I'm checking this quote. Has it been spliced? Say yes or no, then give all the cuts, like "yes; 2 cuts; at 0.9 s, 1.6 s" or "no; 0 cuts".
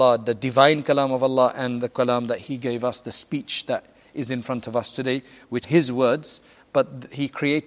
yes; 2 cuts; at 1.8 s, 5.6 s